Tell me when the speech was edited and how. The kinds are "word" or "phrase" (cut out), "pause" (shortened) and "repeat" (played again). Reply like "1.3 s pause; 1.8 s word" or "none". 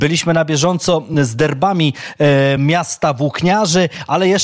none